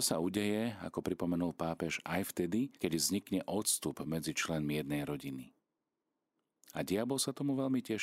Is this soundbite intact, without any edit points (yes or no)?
no